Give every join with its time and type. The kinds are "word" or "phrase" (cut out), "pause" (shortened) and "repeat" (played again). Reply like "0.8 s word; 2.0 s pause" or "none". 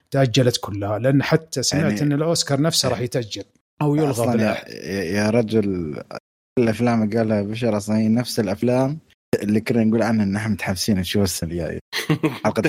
none